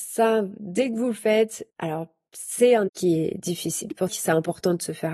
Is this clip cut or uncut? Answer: cut